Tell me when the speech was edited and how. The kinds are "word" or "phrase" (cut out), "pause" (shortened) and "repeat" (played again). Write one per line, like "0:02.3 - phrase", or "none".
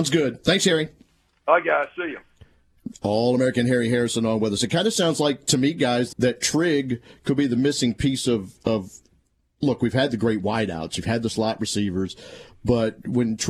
0:06.1 - word